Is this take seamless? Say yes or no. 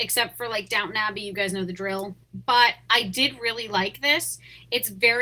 no